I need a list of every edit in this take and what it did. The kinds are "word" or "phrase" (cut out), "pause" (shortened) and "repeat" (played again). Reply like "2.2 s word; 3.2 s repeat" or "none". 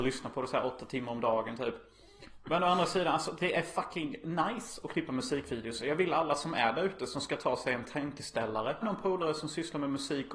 8.8 s phrase